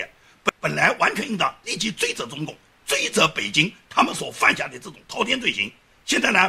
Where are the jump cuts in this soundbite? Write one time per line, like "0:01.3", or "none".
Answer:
none